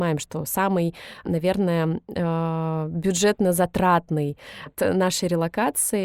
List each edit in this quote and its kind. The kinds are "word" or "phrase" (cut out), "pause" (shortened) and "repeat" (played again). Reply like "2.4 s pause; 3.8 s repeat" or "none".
4.7 s word